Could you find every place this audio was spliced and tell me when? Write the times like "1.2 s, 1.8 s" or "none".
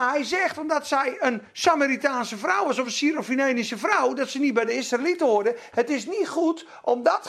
none